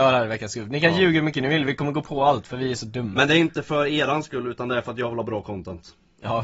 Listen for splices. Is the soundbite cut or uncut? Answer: uncut